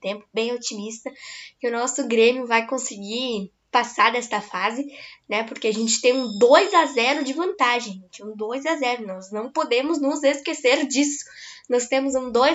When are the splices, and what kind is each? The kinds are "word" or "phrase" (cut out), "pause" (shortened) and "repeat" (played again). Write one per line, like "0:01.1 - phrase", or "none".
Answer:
none